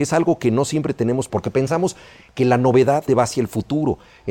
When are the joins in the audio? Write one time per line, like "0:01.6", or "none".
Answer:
0:01.3
0:03.1